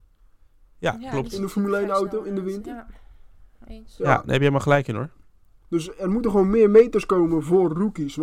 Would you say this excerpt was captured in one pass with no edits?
yes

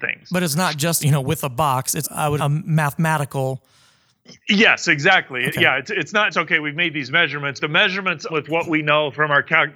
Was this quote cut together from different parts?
yes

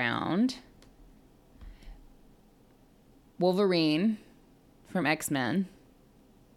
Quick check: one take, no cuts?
yes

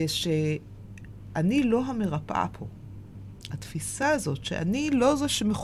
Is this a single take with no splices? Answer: yes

